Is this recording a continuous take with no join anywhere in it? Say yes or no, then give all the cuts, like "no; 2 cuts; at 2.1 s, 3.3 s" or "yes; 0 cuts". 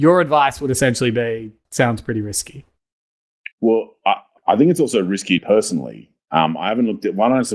no; 4 cuts; at 1.6 s, 3.5 s, 4.4 s, 5.4 s